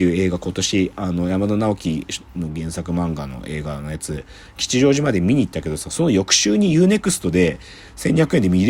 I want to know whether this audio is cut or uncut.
uncut